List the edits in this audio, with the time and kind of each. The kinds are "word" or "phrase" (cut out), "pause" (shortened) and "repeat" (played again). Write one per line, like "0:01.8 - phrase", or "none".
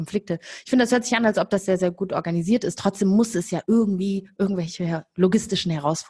none

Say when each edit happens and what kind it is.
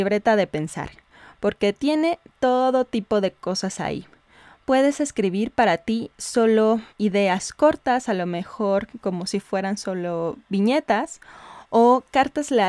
0:06.9 - pause

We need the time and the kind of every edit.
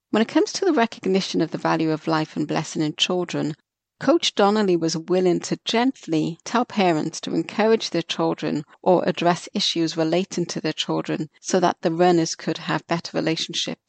none

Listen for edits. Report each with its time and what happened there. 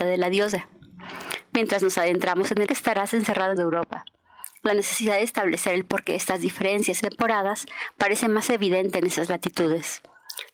0:02.7 - phrase
0:03.6 - phrase
0:07.0 - word

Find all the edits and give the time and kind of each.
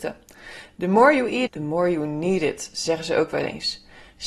0:01.5 - word

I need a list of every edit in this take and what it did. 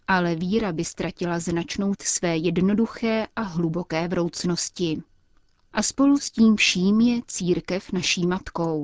0:02.0 - word

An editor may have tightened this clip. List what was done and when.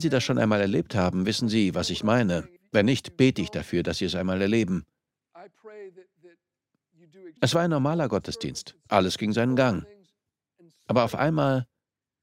0:02.6 - pause
0:07.4 - pause

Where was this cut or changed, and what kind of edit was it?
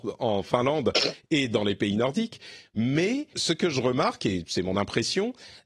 0:03.3 - word

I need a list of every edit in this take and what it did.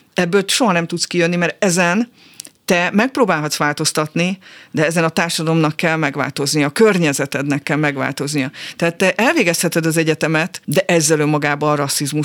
0:10.6 - pause

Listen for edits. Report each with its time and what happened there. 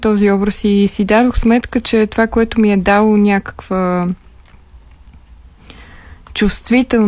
none

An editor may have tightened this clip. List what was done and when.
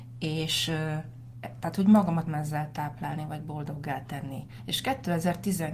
0:02.3 - word

